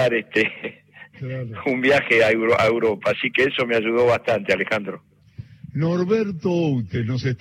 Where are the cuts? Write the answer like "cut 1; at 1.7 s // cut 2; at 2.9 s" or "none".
none